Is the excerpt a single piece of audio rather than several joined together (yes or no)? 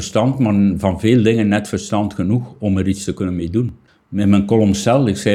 no